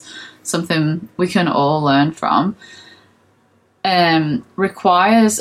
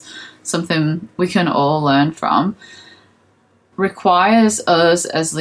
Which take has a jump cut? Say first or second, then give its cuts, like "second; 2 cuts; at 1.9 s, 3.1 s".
second; 1 cut; at 3.7 s